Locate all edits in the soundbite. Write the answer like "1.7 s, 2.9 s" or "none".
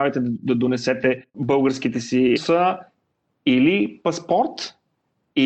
1.3 s, 2.4 s